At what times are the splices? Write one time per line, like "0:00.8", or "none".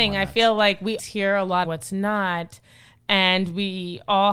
0:01.0
0:01.6